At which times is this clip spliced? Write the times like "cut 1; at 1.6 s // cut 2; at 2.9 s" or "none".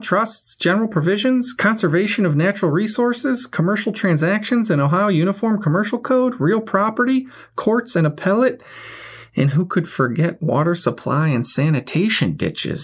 none